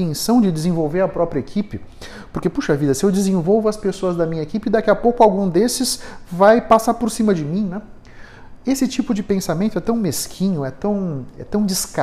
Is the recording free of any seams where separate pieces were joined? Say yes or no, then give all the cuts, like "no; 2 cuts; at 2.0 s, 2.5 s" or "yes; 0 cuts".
yes; 0 cuts